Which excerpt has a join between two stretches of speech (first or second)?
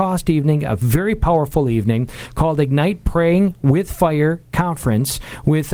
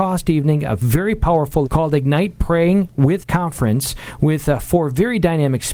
second